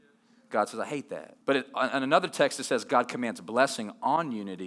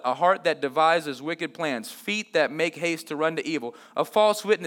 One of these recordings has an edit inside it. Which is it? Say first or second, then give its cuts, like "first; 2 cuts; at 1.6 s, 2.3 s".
first; 1 cut; at 1.4 s